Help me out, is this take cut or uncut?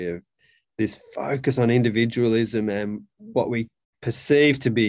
uncut